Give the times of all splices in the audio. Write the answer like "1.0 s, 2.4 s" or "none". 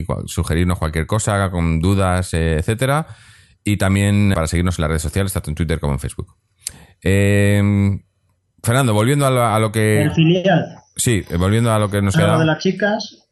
4.3 s, 12.1 s